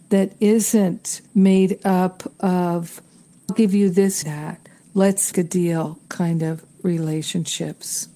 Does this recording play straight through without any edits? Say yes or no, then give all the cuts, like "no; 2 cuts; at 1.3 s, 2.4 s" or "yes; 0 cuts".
no; 4 cuts; at 1.3 s, 3.5 s, 4.2 s, 5.3 s